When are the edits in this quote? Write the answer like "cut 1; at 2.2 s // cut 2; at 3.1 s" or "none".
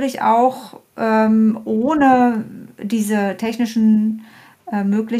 none